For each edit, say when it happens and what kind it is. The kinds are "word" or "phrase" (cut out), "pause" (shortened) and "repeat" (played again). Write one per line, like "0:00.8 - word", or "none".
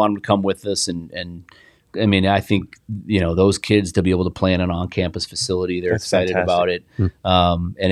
none